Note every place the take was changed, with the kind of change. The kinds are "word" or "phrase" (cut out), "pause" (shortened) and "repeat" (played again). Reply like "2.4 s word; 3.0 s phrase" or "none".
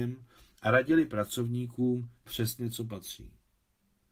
2.3 s word